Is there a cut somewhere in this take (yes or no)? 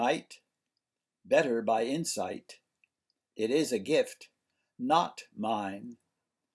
no